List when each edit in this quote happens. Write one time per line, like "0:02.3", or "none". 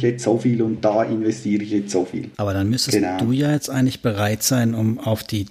0:02.3